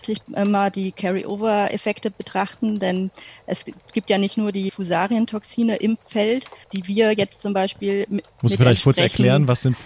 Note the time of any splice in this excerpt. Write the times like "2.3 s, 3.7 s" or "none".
4.7 s, 6.6 s, 8.3 s